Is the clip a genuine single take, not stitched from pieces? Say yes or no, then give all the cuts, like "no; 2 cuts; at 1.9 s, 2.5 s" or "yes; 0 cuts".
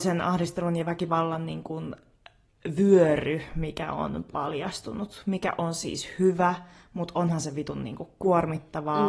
yes; 0 cuts